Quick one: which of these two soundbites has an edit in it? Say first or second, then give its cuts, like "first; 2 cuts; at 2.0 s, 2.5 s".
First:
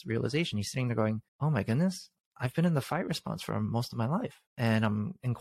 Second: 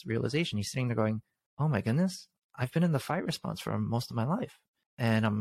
first; 2 cuts; at 1.3 s, 4.5 s